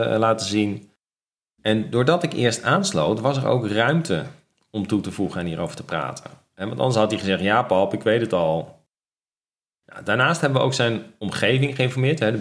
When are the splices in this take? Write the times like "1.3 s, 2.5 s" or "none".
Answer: none

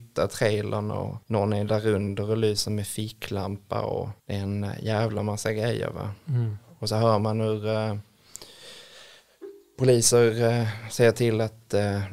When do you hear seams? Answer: 1.2 s, 4.2 s

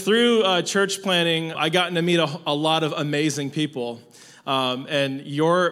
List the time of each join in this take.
1.5 s

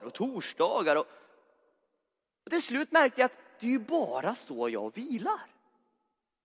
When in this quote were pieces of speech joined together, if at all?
none

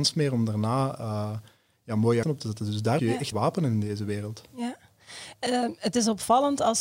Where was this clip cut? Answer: 2.2 s, 3.0 s, 3.3 s

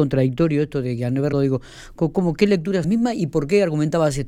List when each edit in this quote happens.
1.3 s, 2.8 s

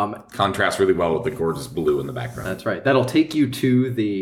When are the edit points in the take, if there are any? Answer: none

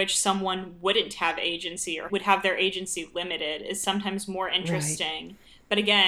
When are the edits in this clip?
2.1 s

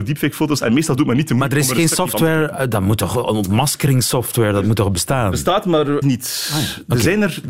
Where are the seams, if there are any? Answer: 6.0 s

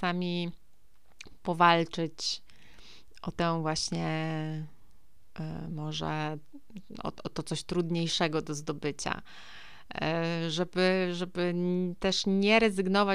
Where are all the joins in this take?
none

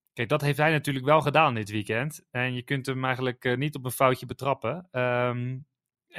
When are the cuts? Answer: none

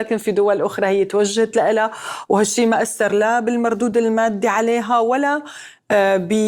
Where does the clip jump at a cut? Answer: none

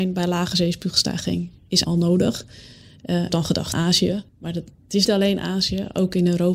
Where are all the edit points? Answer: 1.8 s, 3.3 s, 3.7 s, 4.3 s, 5.1 s

